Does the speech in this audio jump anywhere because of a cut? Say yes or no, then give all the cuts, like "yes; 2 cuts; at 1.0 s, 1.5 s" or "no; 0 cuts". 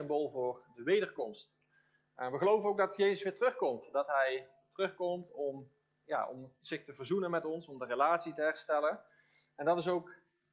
no; 0 cuts